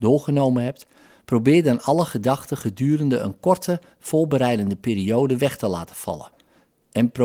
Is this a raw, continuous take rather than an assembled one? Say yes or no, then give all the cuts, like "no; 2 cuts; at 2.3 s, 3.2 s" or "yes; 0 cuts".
yes; 0 cuts